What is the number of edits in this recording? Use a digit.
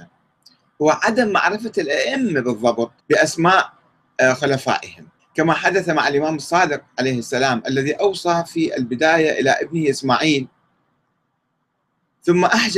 2